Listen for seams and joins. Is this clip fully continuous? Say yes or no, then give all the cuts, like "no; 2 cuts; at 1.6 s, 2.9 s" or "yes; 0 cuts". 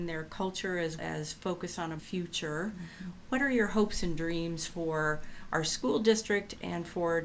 no; 2 cuts; at 1.0 s, 2.0 s